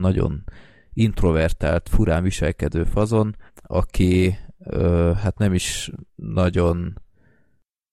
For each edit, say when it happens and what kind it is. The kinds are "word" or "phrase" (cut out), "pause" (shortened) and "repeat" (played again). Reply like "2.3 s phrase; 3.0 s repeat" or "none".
3.5 s pause; 6.1 s pause